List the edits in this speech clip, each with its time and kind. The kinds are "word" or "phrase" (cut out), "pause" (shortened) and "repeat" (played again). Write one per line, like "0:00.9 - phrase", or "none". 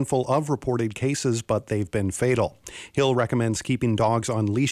none